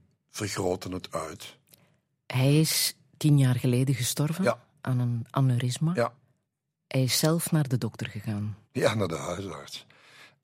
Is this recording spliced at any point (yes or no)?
yes